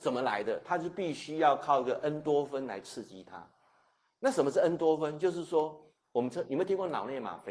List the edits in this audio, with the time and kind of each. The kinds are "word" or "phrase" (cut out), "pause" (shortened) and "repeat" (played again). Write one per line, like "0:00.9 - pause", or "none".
none

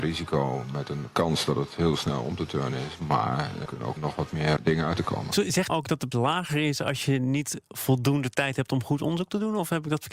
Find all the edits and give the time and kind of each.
0:03.7 - word
0:04.0 - word
0:04.6 - word
0:05.0 - word
0:05.7 - phrase
0:06.1 - word

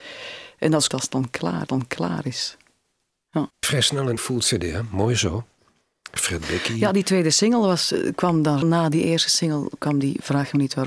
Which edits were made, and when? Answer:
0:00.9 - word
0:01.7 - repeat
0:03.5 - pause
0:04.2 - word
0:06.2 - phrase
0:08.6 - word

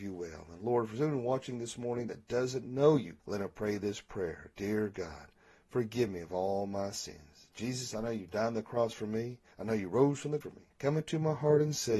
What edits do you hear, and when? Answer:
0:03.2 - pause
0:09.5 - pause
0:10.4 - word
0:10.7 - pause

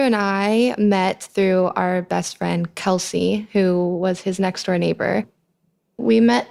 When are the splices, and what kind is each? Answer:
none

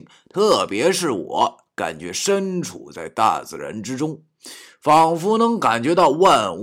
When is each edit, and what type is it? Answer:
none

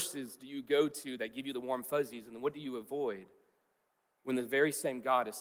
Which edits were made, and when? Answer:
none

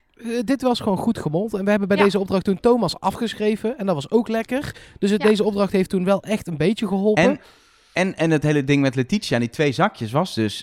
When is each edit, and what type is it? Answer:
none

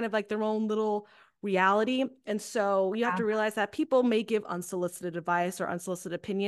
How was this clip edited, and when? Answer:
none

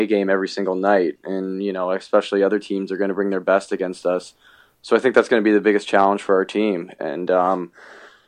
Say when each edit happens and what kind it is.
none

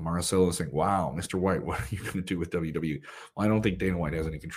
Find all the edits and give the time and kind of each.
none

